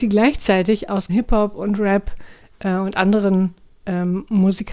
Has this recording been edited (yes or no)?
yes